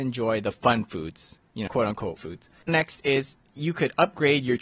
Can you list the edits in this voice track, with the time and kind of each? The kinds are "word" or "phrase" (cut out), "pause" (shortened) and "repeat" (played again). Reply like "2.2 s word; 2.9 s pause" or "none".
1.7 s word; 2.2 s word; 2.7 s word